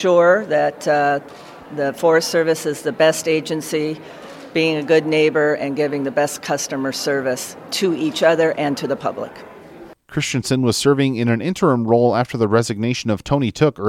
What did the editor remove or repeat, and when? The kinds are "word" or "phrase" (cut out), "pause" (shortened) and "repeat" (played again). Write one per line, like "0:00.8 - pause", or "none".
none